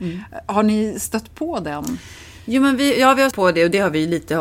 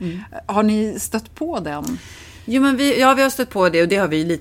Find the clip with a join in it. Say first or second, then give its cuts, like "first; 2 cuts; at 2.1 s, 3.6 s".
first; 1 cut; at 3.3 s